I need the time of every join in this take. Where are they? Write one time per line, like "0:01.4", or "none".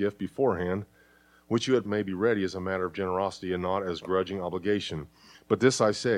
0:01.9